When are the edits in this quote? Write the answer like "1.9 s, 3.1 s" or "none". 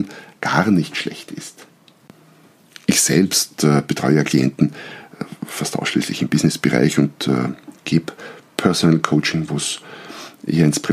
none